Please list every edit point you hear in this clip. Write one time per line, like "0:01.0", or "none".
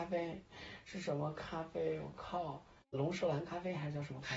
0:02.9